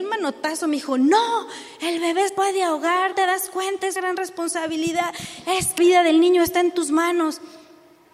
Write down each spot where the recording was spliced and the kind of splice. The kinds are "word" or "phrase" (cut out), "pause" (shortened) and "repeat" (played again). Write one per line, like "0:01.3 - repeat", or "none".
0:02.3 - word
0:03.1 - word
0:04.0 - word
0:05.8 - word